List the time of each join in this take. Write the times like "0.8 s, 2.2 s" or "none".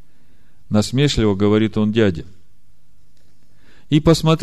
none